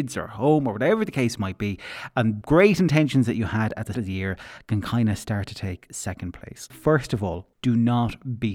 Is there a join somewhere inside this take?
yes; 4 cuts; at 2.4 s, 3.9 s, 6.7 s, 7.5 s

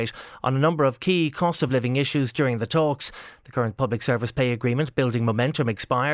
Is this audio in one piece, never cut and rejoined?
yes; 0 cuts

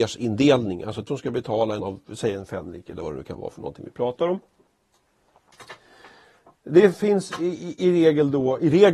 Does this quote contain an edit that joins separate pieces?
yes; 2 cuts; at 1.1 s, 1.8 s

